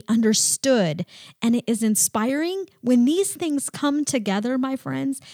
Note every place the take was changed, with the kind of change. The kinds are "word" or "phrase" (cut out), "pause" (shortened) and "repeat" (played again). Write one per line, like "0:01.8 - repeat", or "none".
none